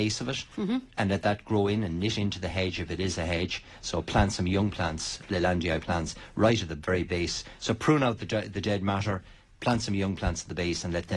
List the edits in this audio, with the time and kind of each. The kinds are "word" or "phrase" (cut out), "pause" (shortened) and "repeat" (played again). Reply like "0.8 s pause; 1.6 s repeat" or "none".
none